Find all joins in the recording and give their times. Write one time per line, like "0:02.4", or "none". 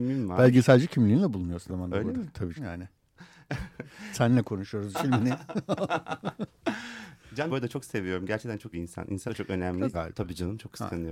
0:01.7
0:02.6
0:04.1
0:04.9
0:07.5
0:08.7
0:09.3
0:09.9